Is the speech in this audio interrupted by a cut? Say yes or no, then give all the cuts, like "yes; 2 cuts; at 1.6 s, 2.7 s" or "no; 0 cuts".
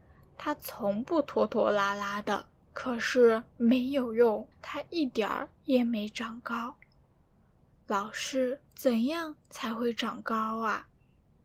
yes; 2 cuts; at 4.5 s, 8.7 s